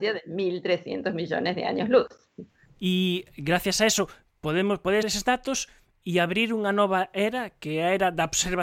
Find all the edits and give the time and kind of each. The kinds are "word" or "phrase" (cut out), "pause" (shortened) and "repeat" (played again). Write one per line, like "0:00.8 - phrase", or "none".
0:05.0 - word

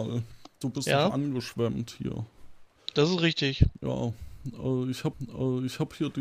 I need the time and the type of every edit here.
0:05.1 - repeat

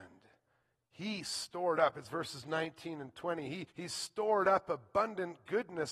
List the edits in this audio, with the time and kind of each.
0:03.7 - pause

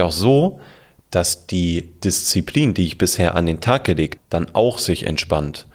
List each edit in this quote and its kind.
0:04.2 - word

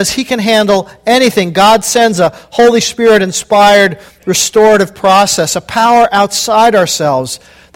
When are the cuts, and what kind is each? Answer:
none

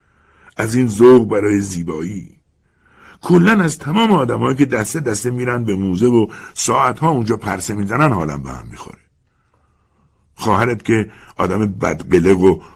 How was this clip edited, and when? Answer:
none

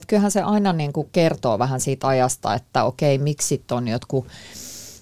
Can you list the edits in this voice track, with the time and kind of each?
none

